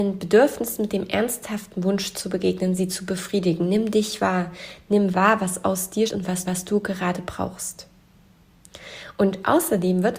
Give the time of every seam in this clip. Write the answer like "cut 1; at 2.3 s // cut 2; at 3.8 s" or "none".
cut 1; at 6.1 s // cut 2; at 6.5 s